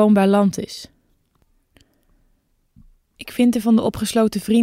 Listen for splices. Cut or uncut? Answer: cut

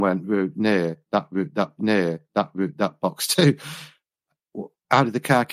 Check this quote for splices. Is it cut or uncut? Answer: cut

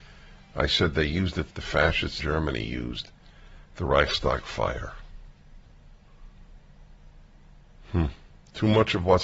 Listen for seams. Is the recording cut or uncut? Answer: cut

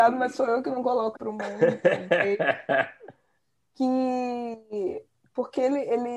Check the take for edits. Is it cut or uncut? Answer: cut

